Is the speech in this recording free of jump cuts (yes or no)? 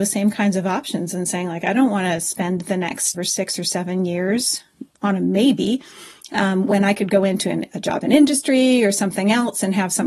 no